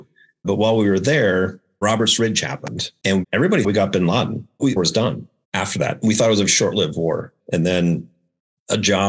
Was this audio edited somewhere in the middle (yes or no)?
yes